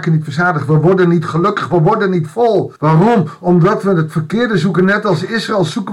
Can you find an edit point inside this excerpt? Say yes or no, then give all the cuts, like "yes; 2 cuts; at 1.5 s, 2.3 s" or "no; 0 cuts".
yes; 1 cut; at 2.8 s